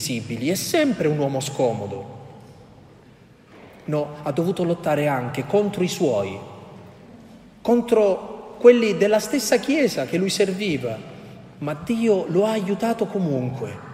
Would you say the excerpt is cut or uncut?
uncut